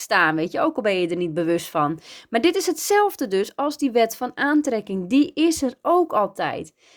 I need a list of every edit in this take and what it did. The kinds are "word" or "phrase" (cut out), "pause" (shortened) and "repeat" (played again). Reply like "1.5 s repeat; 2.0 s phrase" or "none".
none